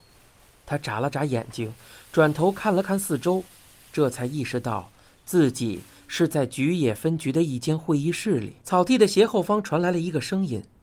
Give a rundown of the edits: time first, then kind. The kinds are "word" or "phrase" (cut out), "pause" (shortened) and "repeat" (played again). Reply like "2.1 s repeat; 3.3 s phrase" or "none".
8.6 s pause